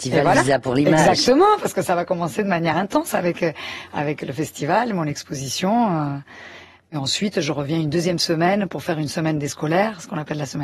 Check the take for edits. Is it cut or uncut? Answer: uncut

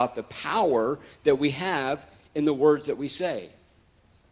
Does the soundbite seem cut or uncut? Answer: uncut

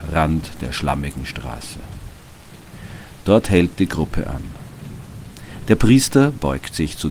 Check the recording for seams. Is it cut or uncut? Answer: uncut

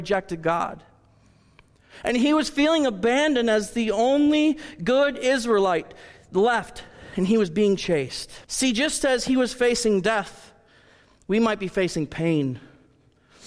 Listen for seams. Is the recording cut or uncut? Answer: cut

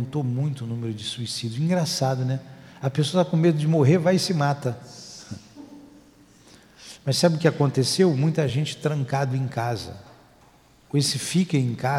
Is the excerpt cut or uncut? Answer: uncut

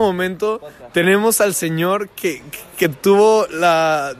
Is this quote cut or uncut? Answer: uncut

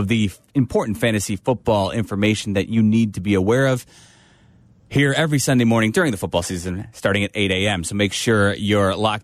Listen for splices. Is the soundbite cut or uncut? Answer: uncut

